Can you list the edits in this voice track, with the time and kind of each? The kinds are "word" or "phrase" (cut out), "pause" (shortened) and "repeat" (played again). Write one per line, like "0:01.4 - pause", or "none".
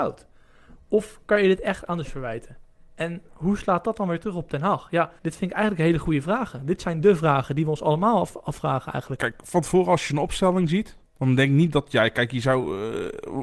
0:02.0 - word
0:05.2 - pause
0:11.1 - pause